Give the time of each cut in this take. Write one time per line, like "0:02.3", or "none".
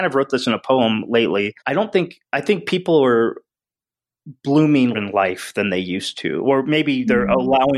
0:01.6
0:02.2
0:04.9